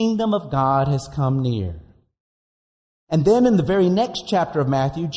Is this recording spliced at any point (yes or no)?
no